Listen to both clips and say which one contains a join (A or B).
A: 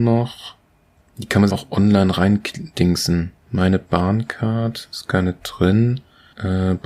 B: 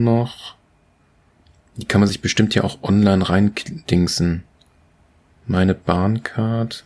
A